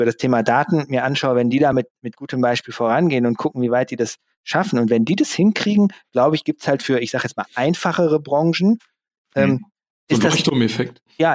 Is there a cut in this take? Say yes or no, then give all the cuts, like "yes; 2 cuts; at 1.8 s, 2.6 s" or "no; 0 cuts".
no; 0 cuts